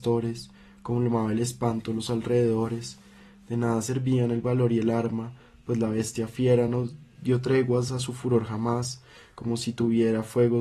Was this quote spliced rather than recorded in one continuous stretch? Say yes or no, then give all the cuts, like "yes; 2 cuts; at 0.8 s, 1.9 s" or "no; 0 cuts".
no; 0 cuts